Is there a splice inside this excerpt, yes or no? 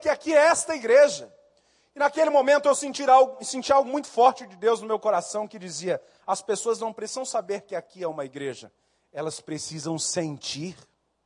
no